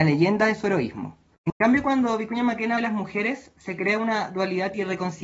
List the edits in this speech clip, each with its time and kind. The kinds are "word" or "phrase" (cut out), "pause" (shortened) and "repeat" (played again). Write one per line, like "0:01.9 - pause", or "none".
0:01.3 - pause
0:02.8 - word